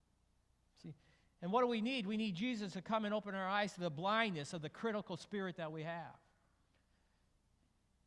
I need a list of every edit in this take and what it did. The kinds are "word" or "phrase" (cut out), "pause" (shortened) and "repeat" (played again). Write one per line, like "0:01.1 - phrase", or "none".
none